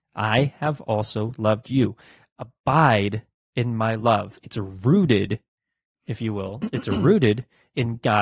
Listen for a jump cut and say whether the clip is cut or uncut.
uncut